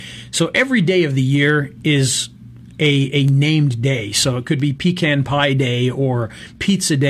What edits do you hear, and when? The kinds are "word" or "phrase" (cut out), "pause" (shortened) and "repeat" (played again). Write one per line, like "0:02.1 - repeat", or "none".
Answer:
0:02.7 - pause